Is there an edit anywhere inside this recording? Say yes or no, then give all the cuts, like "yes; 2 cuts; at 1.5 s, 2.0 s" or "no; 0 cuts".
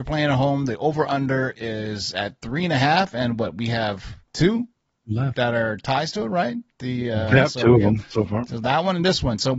no; 0 cuts